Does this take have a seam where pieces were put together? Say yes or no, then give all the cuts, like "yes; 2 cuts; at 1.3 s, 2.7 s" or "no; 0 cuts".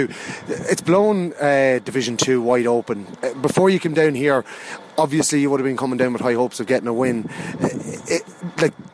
no; 0 cuts